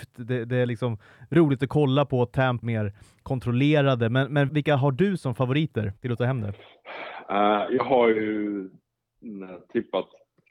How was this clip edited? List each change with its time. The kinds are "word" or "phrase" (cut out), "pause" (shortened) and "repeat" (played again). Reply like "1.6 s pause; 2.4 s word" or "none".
2.6 s word; 4.5 s word; 6.0 s pause